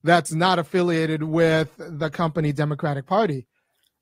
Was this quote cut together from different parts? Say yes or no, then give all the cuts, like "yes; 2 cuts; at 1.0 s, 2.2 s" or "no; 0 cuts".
no; 0 cuts